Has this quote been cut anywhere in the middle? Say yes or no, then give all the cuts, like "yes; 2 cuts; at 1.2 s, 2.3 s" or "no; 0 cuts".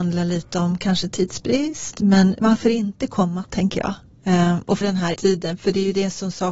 yes; 4 cuts; at 2.4 s, 3.4 s, 4.8 s, 5.1 s